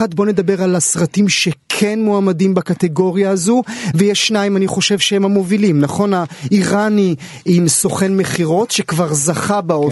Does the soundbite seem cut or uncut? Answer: uncut